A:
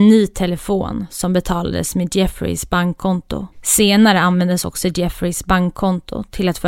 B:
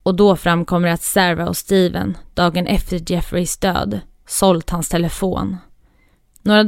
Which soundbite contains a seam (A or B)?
A